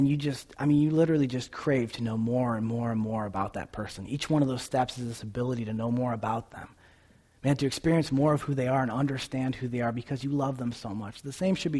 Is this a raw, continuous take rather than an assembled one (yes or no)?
yes